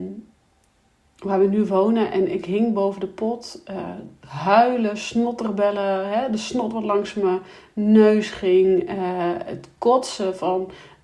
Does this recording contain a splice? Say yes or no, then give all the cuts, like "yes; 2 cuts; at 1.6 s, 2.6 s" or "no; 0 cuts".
no; 0 cuts